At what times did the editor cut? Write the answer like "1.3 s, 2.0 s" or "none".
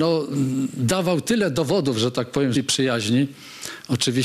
2.5 s

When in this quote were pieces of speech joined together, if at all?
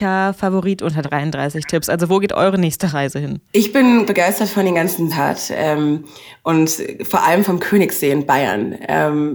1.0 s, 3.4 s, 4.1 s, 5.1 s

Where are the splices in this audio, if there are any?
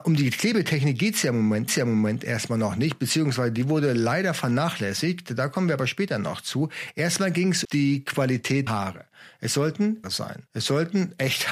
1.7 s, 7.6 s, 8.7 s, 10.0 s, 10.5 s

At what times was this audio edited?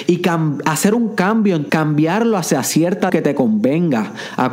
1.7 s, 3.1 s

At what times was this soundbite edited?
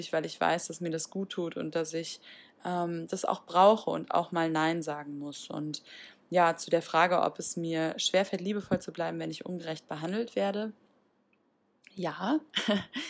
none

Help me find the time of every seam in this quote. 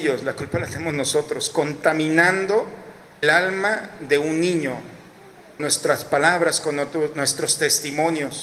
3.2 s, 5.6 s

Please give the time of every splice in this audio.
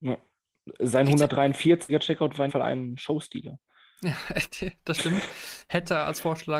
2.5 s

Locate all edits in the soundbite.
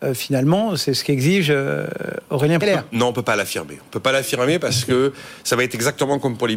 2.6 s

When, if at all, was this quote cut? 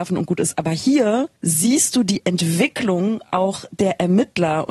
1.4 s

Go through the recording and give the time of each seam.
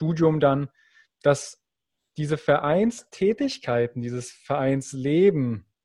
none

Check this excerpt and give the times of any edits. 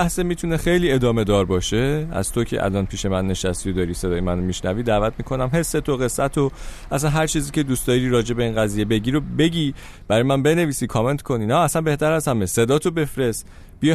none

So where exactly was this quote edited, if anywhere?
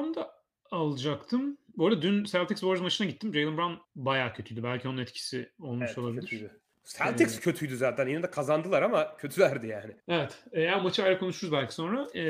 3.8 s, 6.7 s, 10.0 s

